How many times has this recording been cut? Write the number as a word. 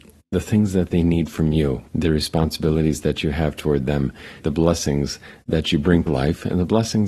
three